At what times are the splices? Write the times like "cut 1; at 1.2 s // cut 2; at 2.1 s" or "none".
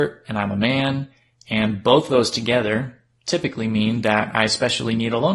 none